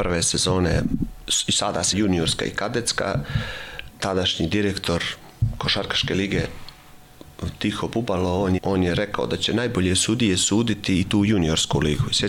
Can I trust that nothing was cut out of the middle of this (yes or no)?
no